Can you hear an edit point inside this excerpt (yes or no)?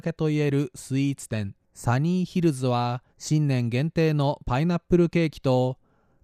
yes